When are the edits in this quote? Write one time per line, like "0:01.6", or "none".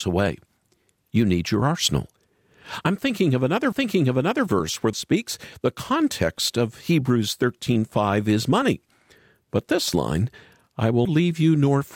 0:03.7
0:04.9
0:11.0